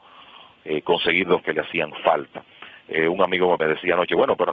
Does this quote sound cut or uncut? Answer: cut